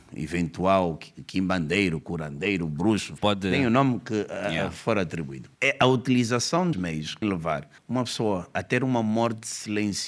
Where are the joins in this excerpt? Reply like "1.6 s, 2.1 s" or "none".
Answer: 3.2 s, 5.5 s, 6.7 s, 7.2 s, 7.8 s

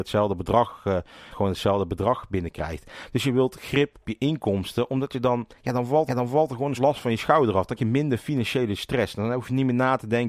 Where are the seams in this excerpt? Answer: 1.3 s, 4.0 s, 5.5 s, 6.1 s, 6.7 s, 7.8 s

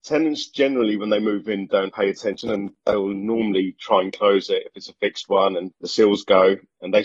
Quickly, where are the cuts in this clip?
1.9 s, 5.7 s

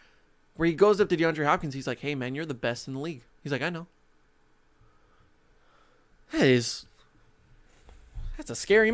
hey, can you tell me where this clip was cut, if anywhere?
none

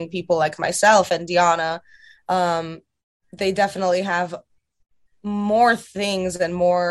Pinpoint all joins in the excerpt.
none

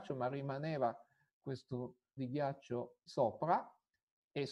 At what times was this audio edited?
2.2 s, 3.1 s

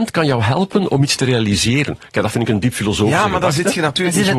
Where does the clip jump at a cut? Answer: none

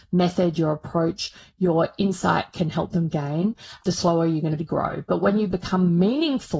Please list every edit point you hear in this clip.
4.6 s

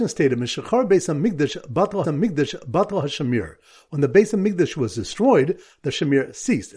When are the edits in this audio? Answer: 2.0 s

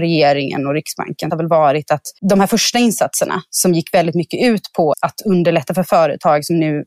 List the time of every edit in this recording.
1.3 s, 2.2 s, 4.9 s

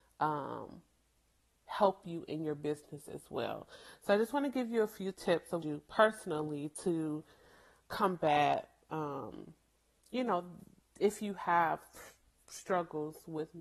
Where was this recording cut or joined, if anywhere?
5.6 s

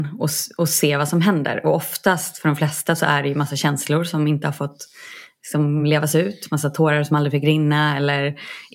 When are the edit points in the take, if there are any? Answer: none

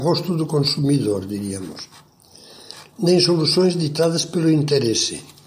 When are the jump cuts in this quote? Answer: none

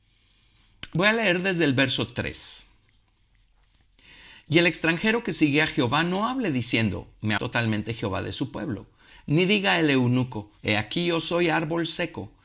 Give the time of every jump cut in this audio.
7.4 s, 10.6 s

